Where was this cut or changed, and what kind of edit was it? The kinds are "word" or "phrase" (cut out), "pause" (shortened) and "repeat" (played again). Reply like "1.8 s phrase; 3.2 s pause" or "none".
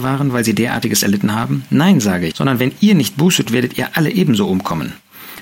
2.3 s word; 3.5 s word